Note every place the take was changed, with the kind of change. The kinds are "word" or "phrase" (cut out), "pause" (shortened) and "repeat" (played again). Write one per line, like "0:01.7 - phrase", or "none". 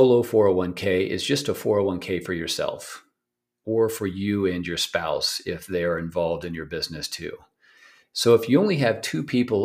none